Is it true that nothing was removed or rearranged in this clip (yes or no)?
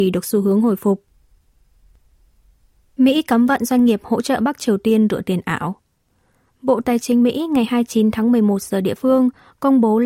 yes